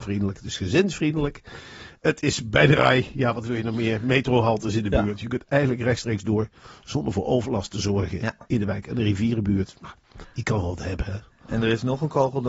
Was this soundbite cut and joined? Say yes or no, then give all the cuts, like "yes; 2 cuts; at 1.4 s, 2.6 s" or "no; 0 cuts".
yes; 1 cut; at 10.0 s